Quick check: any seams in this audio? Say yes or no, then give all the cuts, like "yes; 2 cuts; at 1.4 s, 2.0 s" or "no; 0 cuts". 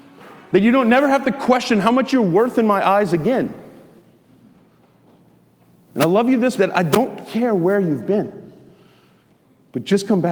yes; 1 cut; at 6.6 s